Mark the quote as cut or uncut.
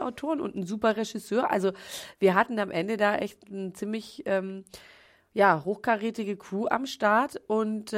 uncut